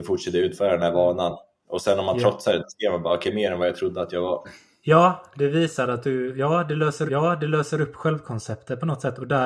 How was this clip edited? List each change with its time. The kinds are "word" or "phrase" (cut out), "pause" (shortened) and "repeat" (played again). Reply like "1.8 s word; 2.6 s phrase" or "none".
3.3 s word; 7.1 s repeat